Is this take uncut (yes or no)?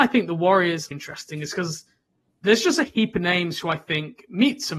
no